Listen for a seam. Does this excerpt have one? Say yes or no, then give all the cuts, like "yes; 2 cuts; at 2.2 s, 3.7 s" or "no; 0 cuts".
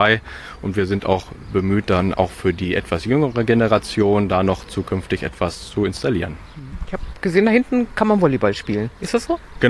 no; 0 cuts